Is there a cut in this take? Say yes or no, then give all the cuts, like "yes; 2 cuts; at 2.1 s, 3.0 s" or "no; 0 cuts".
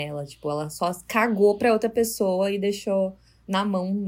no; 0 cuts